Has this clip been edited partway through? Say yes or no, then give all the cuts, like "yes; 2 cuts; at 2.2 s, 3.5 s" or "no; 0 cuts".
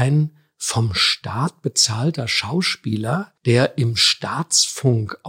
yes; 1 cut; at 3.4 s